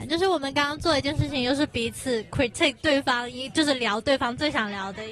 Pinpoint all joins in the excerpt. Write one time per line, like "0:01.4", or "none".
none